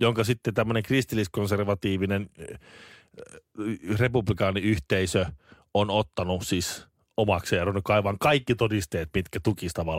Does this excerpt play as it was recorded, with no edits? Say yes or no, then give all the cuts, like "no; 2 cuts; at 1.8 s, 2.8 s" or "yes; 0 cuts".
yes; 0 cuts